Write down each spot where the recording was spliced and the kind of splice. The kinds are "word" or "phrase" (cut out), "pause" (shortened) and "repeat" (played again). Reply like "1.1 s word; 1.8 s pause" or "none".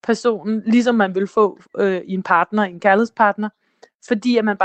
none